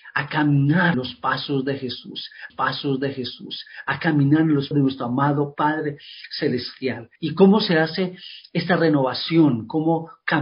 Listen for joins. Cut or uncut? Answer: cut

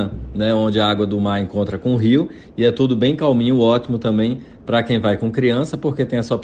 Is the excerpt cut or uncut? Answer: uncut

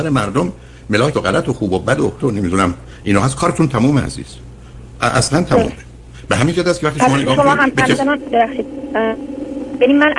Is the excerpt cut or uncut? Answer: cut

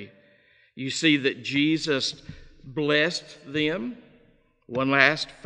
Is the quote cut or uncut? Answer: uncut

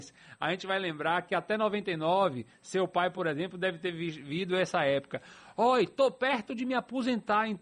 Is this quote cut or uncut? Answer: uncut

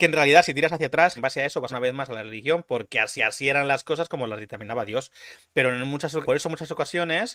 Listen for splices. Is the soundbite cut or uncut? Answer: cut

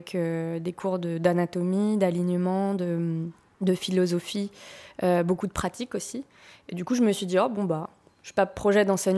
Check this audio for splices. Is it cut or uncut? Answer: uncut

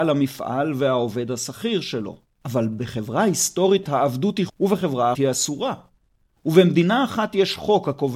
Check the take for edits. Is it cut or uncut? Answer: cut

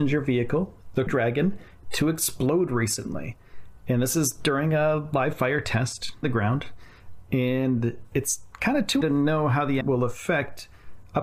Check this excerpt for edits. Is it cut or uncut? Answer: cut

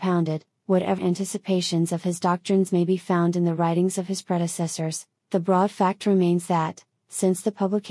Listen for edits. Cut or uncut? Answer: cut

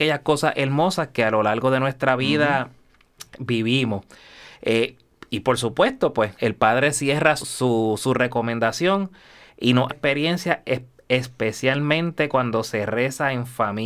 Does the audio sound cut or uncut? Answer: cut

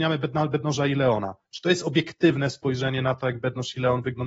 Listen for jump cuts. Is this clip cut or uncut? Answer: uncut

